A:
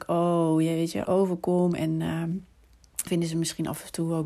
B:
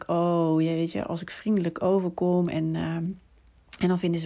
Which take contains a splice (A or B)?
A